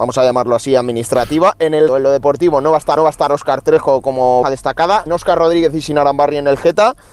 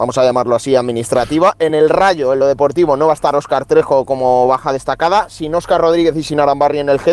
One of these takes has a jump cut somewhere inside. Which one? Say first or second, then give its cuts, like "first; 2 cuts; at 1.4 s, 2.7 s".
first; 4 cuts; at 1.9 s, 3.0 s, 4.4 s, 5.1 s